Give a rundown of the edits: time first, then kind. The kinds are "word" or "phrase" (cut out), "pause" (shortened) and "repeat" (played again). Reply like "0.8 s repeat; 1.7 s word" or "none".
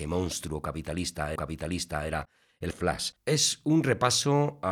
1.4 s repeat; 2.7 s word; 3.2 s pause